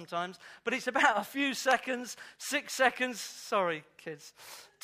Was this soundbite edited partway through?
no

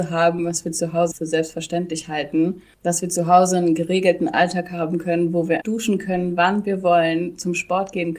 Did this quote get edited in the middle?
yes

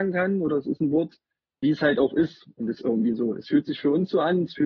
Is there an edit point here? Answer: yes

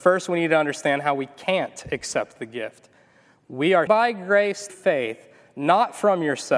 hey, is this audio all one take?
no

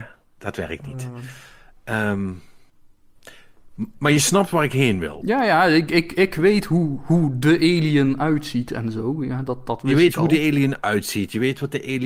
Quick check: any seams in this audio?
no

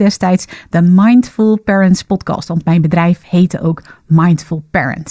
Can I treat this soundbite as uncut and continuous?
yes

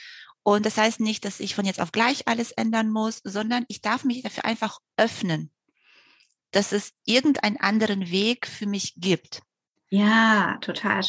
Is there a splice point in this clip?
no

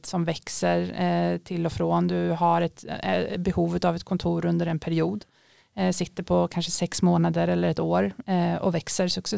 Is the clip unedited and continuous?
yes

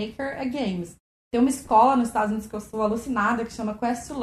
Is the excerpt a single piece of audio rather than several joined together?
yes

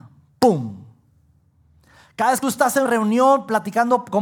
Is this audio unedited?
no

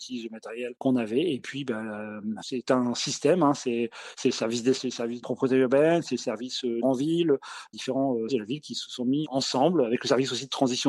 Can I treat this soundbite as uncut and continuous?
no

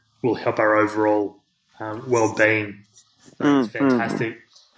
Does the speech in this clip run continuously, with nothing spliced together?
yes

